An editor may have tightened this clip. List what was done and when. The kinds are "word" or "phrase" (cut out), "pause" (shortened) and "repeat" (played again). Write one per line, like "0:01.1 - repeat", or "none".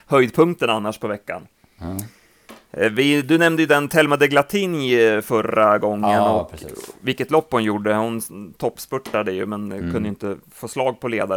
none